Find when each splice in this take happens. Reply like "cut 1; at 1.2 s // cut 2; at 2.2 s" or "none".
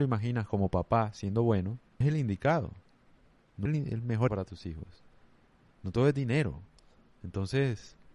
cut 1; at 2.0 s // cut 2; at 3.7 s // cut 3; at 4.3 s